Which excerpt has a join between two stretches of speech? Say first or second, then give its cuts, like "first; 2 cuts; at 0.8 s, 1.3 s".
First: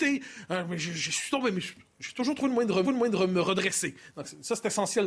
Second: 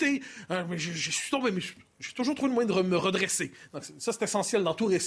first; 1 cut; at 2.8 s